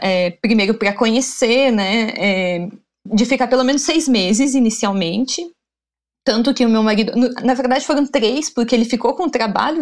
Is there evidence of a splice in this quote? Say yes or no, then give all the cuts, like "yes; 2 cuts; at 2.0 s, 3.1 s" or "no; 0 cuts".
no; 0 cuts